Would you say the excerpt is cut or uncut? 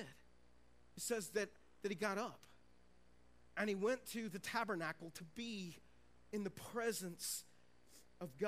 uncut